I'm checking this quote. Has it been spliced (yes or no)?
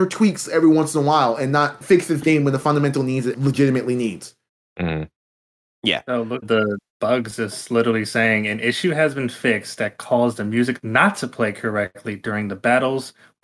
yes